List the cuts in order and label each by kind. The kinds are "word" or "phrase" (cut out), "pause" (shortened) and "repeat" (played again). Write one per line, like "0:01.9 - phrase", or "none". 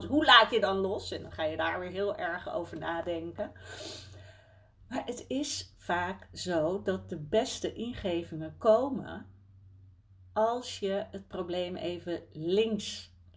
none